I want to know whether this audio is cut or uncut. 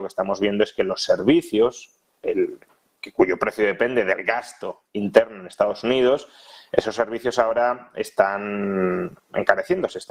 uncut